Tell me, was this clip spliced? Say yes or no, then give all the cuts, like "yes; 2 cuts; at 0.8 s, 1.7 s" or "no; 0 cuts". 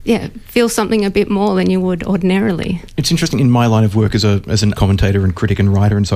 yes; 1 cut; at 4.8 s